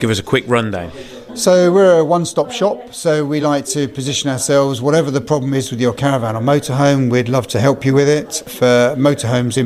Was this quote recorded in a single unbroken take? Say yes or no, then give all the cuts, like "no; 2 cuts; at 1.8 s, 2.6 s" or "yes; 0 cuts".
yes; 0 cuts